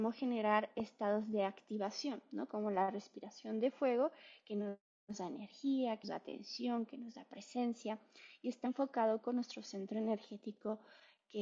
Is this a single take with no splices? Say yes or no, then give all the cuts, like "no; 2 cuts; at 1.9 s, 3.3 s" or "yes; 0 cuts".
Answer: no; 2 cuts; at 6.0 s, 8.7 s